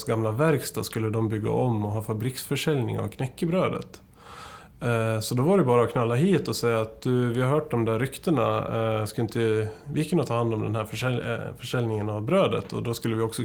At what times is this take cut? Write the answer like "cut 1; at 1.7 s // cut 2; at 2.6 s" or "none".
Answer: none